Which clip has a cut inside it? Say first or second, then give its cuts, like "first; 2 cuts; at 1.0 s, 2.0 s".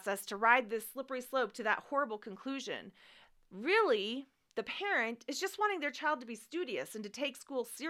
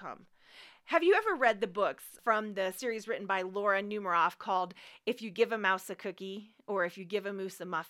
second; 1 cut; at 2.2 s